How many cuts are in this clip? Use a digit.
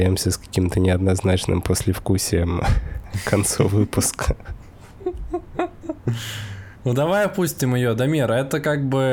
1